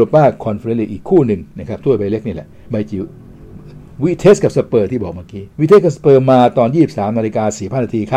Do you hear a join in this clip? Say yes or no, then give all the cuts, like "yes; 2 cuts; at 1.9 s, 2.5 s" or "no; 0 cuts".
yes; 1 cut; at 5.5 s